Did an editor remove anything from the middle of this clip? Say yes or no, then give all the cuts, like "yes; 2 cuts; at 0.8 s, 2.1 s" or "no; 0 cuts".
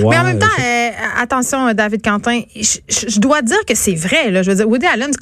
no; 0 cuts